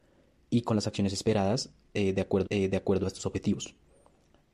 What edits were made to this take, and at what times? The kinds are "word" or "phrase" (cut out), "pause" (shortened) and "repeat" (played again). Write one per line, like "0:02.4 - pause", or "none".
0:02.4 - repeat